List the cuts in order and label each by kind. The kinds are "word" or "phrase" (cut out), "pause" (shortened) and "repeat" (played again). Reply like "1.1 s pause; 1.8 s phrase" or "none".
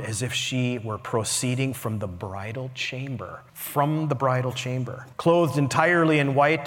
3.5 s pause; 5.1 s pause